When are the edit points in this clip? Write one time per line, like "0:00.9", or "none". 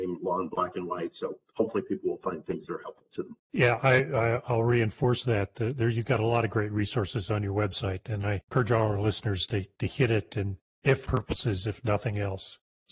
0:11.0